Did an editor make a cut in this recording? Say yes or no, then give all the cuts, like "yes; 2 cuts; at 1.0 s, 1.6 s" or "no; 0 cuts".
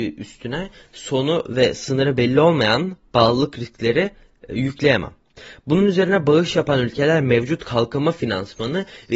no; 0 cuts